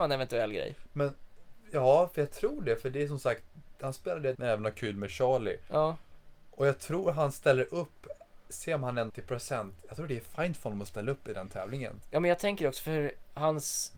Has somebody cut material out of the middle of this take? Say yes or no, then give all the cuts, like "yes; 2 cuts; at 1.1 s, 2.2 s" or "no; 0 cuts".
yes; 2 cuts; at 4.3 s, 9.1 s